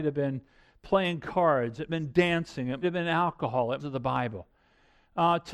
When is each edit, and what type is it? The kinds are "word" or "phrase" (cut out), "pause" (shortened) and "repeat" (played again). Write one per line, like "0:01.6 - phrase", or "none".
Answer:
0:01.9 - phrase
0:02.8 - word
0:03.8 - phrase